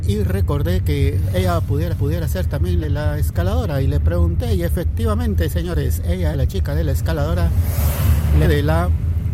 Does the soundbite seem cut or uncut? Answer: cut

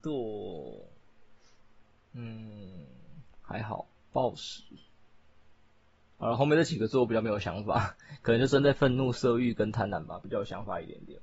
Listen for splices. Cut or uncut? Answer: uncut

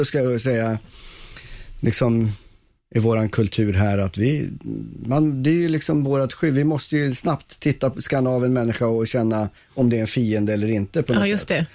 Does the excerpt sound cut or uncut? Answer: uncut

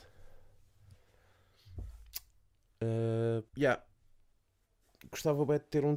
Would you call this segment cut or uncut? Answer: cut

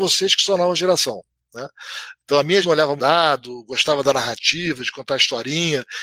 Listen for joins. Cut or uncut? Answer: cut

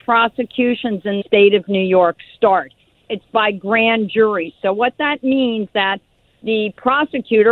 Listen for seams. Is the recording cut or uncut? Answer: cut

